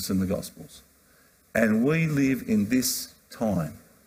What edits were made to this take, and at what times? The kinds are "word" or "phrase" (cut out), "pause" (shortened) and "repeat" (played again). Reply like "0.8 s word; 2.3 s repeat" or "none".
none